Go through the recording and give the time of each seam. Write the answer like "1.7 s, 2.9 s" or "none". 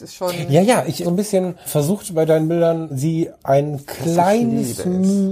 1.0 s, 1.7 s, 2.9 s